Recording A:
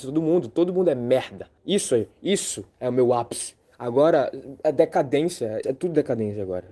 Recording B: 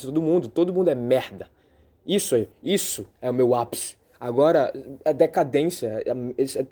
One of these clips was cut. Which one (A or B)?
A